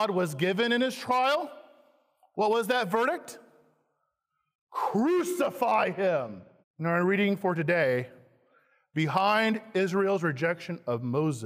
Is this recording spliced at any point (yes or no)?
yes